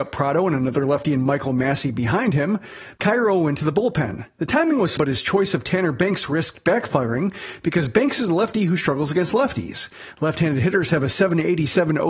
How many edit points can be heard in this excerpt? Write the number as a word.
one